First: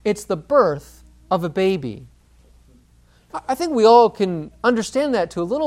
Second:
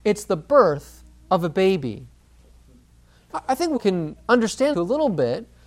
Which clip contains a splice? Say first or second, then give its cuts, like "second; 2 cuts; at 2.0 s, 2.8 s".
second; 2 cuts; at 3.8 s, 4.7 s